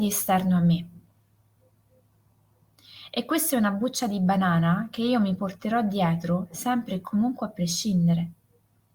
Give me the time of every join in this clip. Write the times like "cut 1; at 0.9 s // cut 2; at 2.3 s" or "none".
none